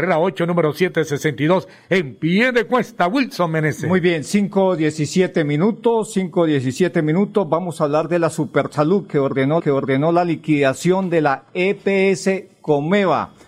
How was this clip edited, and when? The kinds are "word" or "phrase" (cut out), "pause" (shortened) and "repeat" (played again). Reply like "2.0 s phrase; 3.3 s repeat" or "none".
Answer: 9.6 s repeat

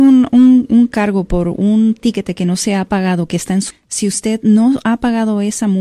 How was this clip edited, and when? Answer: 3.7 s word

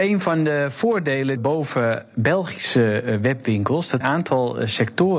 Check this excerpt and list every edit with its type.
1.4 s phrase; 4.0 s phrase

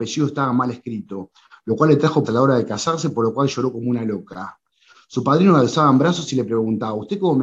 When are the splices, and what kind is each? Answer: 2.3 s word

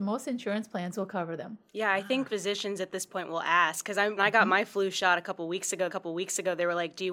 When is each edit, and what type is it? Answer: 1.7 s pause; 2.3 s word; 4.2 s word; 5.9 s repeat

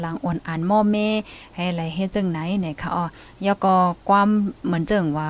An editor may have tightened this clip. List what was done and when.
none

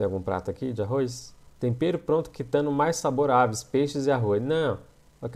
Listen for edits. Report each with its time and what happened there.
1.5 s pause

